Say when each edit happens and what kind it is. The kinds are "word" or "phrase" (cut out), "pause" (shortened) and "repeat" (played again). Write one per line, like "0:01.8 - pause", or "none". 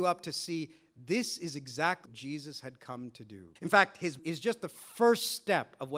0:02.1 - word
0:03.6 - pause
0:04.2 - word